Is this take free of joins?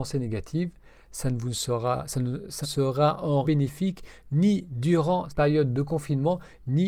no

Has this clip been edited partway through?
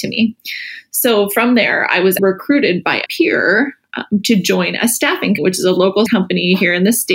yes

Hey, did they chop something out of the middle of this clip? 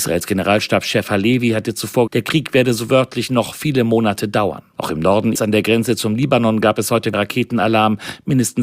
yes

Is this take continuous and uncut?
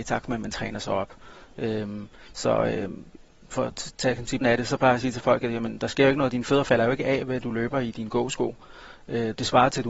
no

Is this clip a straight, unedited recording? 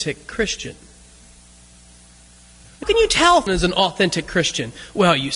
no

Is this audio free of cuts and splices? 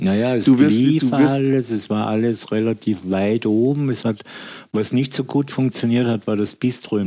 yes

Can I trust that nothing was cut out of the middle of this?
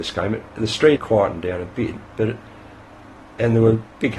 no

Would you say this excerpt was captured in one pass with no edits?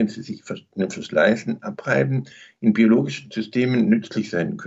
yes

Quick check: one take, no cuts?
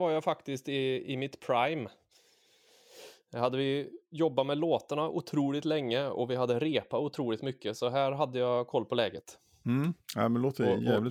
yes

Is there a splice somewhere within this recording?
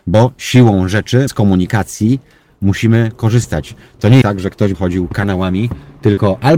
yes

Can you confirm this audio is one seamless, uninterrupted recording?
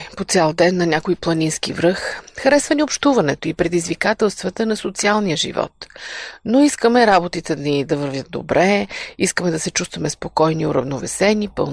yes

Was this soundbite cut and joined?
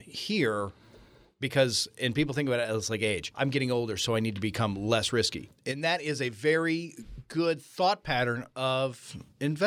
no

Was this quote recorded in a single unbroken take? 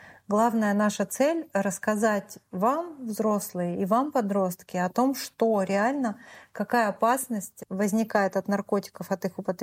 yes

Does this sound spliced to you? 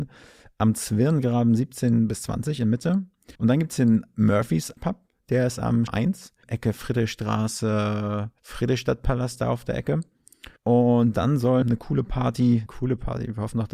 yes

